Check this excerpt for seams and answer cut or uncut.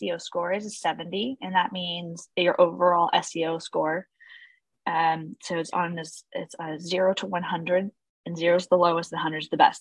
uncut